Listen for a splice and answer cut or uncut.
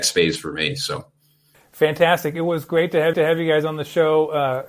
cut